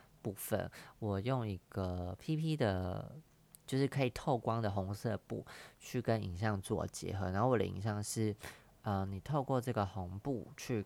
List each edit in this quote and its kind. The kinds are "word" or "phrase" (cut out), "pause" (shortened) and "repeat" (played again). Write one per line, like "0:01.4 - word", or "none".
none